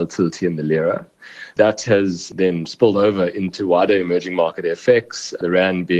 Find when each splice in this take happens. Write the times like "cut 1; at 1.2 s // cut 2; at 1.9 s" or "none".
none